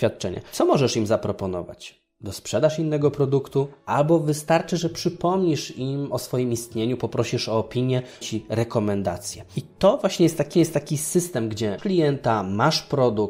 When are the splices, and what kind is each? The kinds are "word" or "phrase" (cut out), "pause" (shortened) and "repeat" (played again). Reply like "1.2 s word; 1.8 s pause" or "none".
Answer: 8.2 s phrase; 10.5 s repeat; 11.8 s word